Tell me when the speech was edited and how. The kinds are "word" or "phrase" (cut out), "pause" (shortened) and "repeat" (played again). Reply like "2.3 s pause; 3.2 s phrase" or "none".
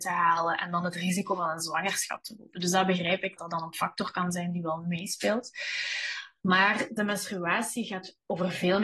3.4 s word